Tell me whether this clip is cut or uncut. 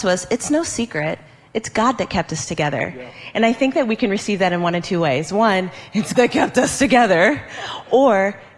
cut